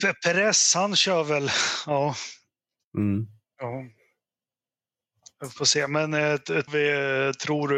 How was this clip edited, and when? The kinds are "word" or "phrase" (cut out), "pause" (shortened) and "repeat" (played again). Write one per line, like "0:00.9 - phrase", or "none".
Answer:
0:06.7 - word